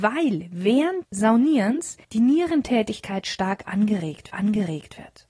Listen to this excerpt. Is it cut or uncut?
cut